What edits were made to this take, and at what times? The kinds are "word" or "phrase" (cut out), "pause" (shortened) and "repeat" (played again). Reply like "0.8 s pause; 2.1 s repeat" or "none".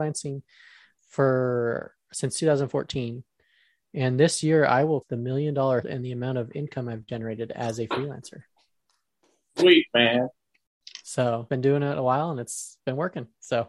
0.9 s word; 5.0 s word; 5.8 s word; 11.5 s word